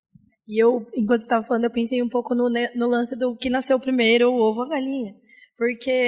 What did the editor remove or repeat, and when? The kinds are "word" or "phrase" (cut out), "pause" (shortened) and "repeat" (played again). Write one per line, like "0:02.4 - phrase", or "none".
none